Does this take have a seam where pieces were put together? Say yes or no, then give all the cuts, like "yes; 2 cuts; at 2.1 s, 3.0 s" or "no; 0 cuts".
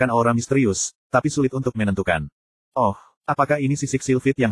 no; 0 cuts